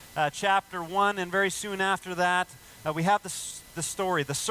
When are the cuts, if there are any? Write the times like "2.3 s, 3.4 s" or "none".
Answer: none